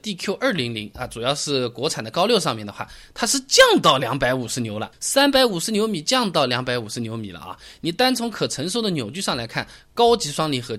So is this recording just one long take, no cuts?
no; 1 cut; at 4.9 s

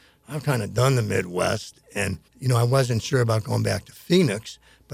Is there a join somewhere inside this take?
yes; 1 cut; at 2.3 s

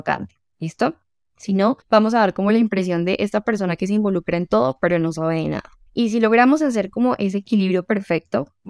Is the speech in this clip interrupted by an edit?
yes; 3 cuts; at 1.2 s, 1.8 s, 5.9 s

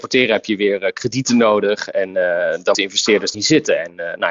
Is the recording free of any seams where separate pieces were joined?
no; 2 cuts; at 2.7 s, 3.3 s

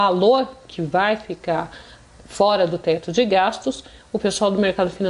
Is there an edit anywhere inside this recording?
no; 0 cuts

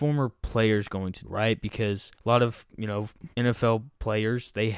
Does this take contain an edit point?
yes; 3 cuts; at 1.2 s, 2.1 s, 3.3 s

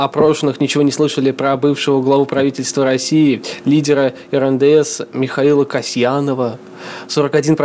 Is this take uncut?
yes; 0 cuts

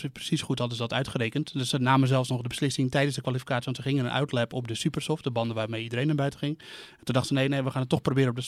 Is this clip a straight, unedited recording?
yes; 0 cuts

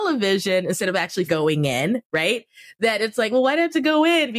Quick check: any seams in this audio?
yes; 1 cut; at 1.3 s

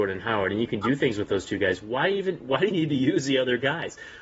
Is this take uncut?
no; 1 cut; at 2.7 s

